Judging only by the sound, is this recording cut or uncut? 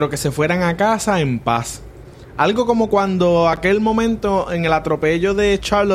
uncut